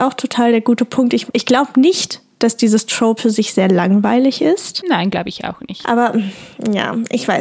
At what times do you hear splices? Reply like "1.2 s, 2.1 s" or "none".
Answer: 1.3 s, 3.2 s